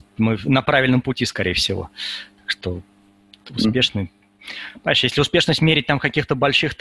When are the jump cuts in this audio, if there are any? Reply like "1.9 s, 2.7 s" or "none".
none